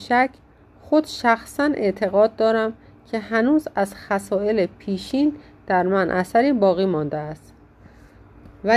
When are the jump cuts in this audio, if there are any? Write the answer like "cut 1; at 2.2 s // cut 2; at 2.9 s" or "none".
none